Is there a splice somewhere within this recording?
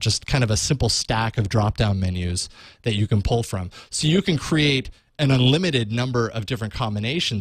no; 0 cuts

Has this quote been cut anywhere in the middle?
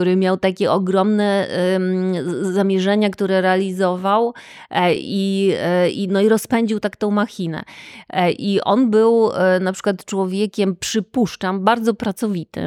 no; 0 cuts

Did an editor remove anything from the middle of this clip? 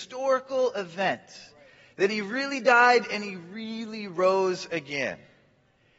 no; 0 cuts

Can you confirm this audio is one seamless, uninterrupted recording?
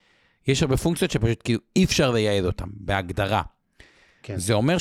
yes; 0 cuts

